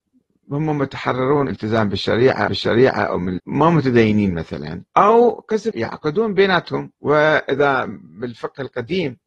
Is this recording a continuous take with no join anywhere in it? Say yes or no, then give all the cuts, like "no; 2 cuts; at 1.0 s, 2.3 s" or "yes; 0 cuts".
no; 6 cuts; at 1.5 s, 2.5 s, 3.4 s, 4.9 s, 5.7 s, 6.9 s